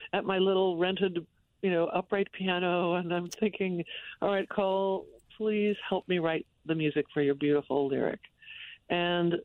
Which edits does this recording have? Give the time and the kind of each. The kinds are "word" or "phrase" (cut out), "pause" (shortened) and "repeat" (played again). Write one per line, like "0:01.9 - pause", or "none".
none